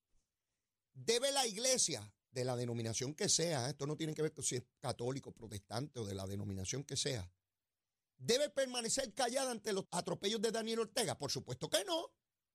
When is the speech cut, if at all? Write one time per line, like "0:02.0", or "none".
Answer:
0:09.8